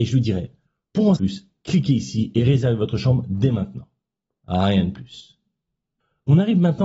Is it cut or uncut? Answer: cut